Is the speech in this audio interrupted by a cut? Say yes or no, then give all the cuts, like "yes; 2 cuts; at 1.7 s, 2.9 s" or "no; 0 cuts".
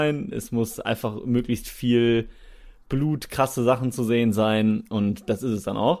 no; 0 cuts